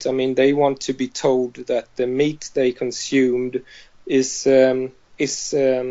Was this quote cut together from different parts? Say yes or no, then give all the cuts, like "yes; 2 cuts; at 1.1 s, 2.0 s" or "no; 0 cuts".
no; 0 cuts